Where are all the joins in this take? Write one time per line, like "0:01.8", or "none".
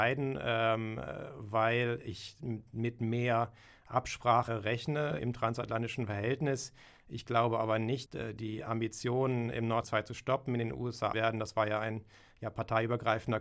0:04.5
0:05.2
0:08.1
0:09.8
0:11.1